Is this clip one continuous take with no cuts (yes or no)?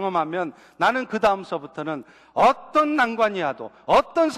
yes